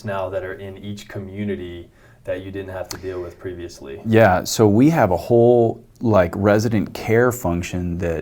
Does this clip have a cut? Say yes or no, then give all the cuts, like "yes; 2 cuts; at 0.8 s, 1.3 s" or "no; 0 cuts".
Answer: no; 0 cuts